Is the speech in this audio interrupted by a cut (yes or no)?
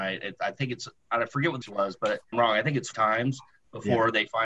yes